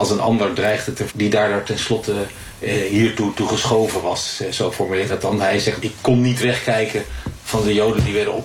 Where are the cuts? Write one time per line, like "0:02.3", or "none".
0:01.1
0:05.1
0:05.8